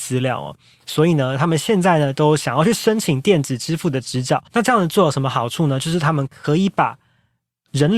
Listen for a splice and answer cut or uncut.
cut